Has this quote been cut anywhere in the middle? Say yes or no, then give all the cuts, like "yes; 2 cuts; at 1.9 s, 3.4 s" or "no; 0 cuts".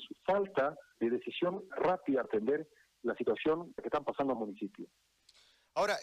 yes; 5 cuts; at 1.0 s, 1.7 s, 2.2 s, 3.8 s, 4.4 s